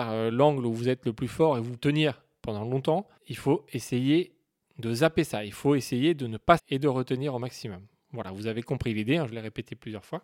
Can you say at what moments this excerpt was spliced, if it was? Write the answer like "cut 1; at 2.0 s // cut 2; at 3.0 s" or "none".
cut 1; at 1.8 s // cut 2; at 3.2 s // cut 3; at 6.6 s